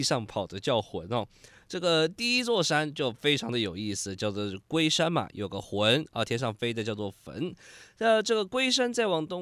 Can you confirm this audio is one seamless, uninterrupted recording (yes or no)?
yes